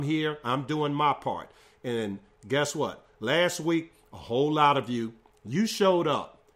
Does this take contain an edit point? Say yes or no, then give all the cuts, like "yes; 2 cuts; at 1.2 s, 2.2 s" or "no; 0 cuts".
no; 0 cuts